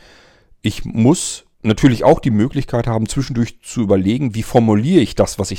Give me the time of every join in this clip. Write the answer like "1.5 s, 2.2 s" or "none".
1.5 s